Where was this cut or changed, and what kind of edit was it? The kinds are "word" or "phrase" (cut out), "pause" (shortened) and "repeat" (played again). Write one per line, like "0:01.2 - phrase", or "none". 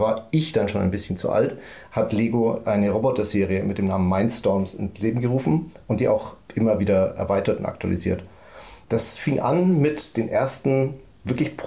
0:08.8 - pause